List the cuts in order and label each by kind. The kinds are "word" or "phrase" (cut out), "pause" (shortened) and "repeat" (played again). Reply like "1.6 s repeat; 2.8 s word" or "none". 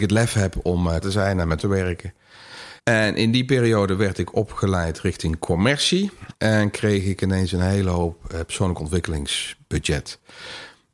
1.0 s word; 1.6 s word; 2.8 s pause; 6.3 s pause